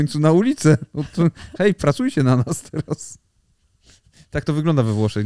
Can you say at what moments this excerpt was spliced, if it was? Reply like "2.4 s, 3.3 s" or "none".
none